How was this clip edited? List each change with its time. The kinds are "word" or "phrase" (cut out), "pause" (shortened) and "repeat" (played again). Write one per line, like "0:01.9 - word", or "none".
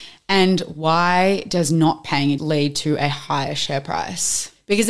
0:02.4 - word